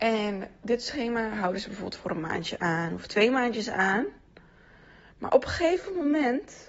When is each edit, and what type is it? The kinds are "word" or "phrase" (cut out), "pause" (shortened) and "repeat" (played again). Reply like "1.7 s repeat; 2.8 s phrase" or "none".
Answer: none